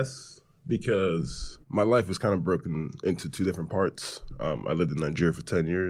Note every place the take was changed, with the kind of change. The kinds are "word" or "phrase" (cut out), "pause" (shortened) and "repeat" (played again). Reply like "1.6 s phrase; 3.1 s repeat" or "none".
1.6 s pause